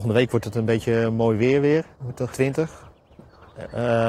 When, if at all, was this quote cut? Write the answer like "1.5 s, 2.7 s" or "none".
1.9 s, 2.3 s